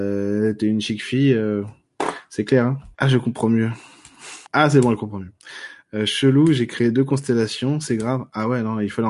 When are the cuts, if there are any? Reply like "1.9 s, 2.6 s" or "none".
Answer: 2.9 s, 4.5 s